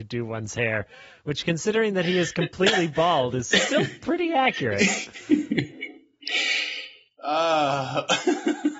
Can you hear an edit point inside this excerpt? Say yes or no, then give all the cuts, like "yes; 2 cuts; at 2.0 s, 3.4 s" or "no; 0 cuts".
no; 0 cuts